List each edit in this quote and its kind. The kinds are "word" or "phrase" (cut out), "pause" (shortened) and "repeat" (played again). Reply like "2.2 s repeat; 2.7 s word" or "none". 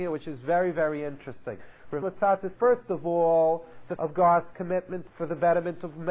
2.0 s word; 2.6 s word; 4.0 s word; 5.1 s word